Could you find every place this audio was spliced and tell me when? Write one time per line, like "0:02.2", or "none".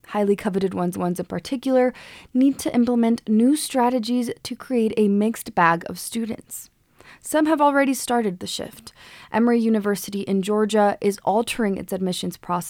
0:00.9

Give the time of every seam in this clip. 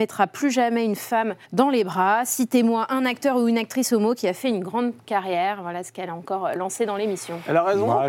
0:01.4

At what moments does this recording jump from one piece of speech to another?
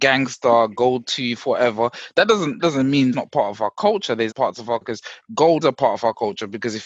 0:02.6
0:03.1
0:04.3
0:04.8
0:05.6

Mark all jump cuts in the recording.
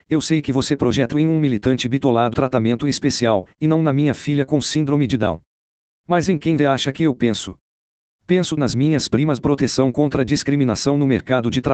0:01.1
0:02.3
0:06.6
0:08.6
0:09.4

